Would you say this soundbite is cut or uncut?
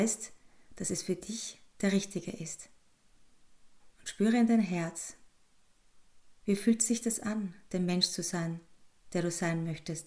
cut